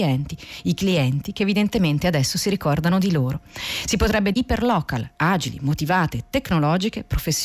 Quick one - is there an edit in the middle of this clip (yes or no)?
yes